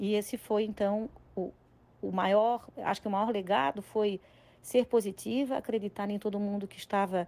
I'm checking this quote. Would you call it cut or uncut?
uncut